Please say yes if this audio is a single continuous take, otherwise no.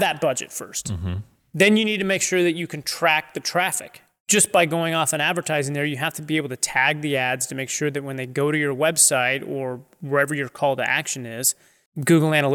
yes